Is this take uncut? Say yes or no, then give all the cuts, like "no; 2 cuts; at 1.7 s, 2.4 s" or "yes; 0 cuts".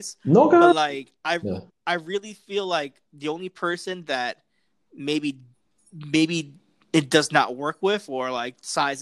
no; 1 cut; at 5.5 s